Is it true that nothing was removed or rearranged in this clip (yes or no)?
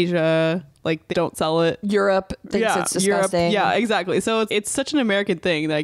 no